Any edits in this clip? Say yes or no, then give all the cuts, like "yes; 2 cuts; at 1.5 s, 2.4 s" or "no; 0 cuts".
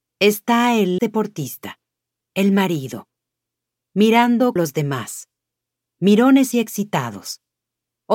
yes; 3 cuts; at 1.0 s, 4.6 s, 6.5 s